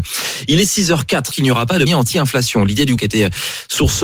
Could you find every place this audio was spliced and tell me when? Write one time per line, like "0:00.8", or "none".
0:01.3
0:01.9
0:03.0